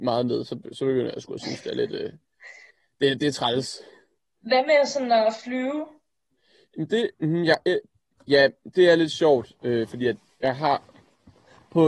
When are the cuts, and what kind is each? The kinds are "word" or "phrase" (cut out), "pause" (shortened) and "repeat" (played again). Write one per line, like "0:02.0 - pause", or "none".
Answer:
0:07.1 - pause